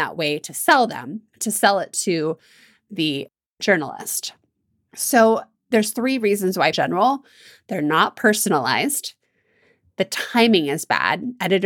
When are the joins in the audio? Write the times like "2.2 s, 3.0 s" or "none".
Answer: 6.7 s